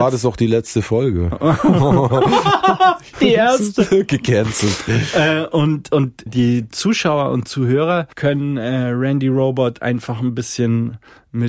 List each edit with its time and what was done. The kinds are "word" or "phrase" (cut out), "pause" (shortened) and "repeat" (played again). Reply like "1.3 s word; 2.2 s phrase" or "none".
3.1 s word; 6.3 s word; 8.1 s pause